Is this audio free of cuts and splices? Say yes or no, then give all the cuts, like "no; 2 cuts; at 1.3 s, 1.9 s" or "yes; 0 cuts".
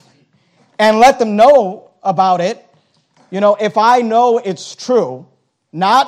yes; 0 cuts